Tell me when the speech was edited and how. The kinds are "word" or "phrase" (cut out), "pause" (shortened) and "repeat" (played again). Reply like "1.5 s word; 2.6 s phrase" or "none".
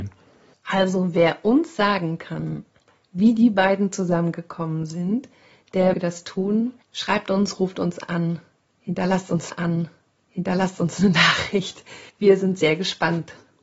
5.9 s word; 6.8 s pause; 9.5 s repeat; 12.1 s pause